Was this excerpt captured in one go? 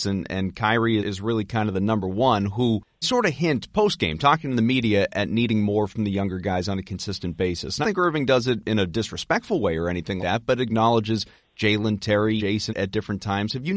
no; 6 cuts; at 1.0 s, 3.0 s, 7.8 s, 10.2 s, 12.4 s, 12.7 s

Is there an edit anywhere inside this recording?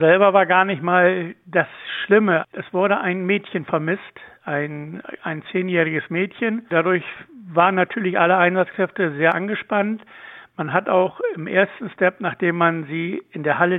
no; 0 cuts

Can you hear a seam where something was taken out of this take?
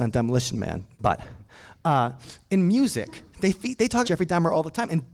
yes; 3 cuts; at 0.9 s, 3.3 s, 4.0 s

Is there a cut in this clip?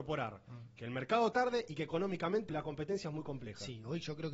yes; 2 cuts; at 1.3 s, 2.5 s

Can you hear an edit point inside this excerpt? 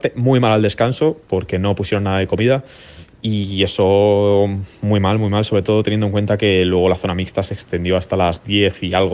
no; 0 cuts

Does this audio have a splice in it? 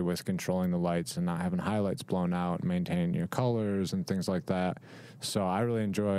no; 0 cuts

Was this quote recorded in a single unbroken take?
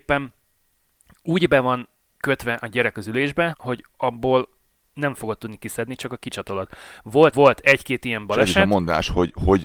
no; 3 cuts; at 3.5 s, 3.9 s, 7.3 s

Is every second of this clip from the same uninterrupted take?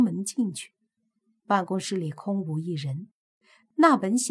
yes; 0 cuts

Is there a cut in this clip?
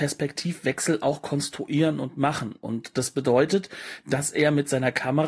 no; 0 cuts

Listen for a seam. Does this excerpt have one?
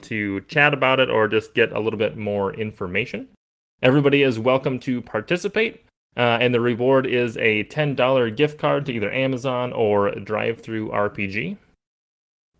no; 0 cuts

